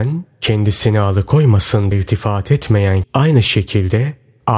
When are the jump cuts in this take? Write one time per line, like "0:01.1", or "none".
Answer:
0:01.9
0:03.0